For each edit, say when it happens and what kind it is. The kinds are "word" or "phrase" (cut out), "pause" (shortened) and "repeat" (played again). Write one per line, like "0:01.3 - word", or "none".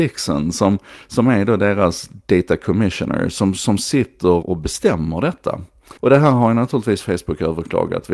0:04.4 - word
0:06.0 - pause

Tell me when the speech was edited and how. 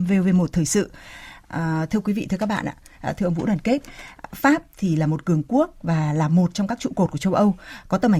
none

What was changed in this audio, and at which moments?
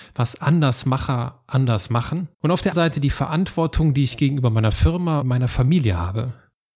0:02.3 - pause
0:02.7 - word
0:05.2 - word

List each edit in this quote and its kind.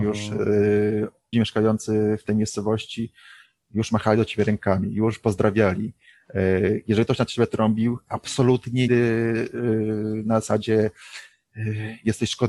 0:01.3 - word
0:08.9 - word

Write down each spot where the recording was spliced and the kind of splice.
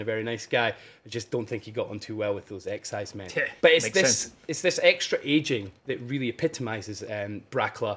0:03.6 - pause
0:05.8 - pause

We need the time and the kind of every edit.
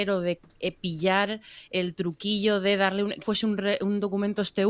0:03.2 - word

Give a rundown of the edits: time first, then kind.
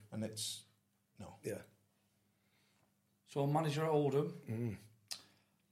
none

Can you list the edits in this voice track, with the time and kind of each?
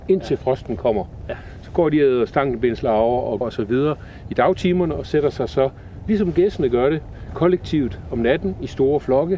0:03.4 - word

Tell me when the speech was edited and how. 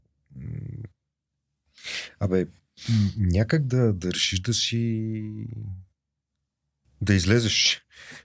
none

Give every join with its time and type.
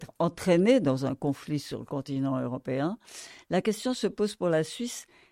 none

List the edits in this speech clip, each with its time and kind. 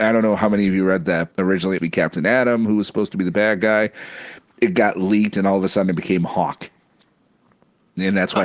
0:01.3 - phrase
0:01.8 - phrase

